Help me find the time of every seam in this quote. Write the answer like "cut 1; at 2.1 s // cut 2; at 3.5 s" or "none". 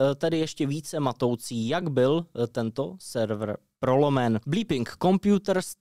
none